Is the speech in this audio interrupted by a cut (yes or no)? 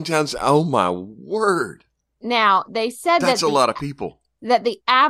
no